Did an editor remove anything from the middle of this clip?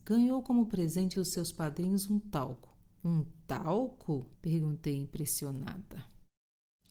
yes; 3 cuts; at 1.1 s, 2.9 s, 4.3 s

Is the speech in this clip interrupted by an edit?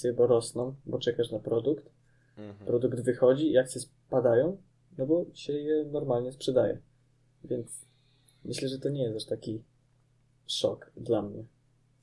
no; 0 cuts

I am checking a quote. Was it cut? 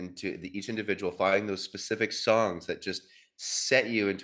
no; 0 cuts

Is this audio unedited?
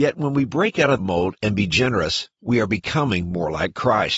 no; 1 cut; at 1.0 s

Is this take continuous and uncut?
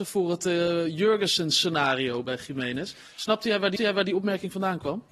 no; 2 cuts; at 2.2 s, 3.8 s

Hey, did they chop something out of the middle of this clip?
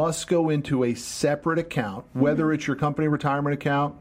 no; 0 cuts

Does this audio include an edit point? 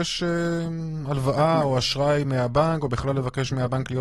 no; 0 cuts

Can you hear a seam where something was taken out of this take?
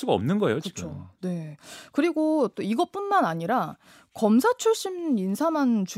no; 0 cuts

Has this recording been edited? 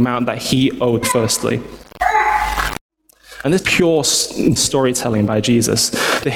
yes; 3 cuts; at 1.0 s, 3.6 s, 4.6 s

